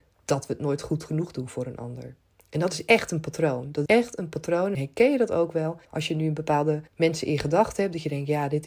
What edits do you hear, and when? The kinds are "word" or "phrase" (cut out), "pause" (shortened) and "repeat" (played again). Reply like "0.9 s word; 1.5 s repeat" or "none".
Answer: 2.3 s pause; 3.9 s word; 4.7 s word; 5.8 s pause; 6.9 s pause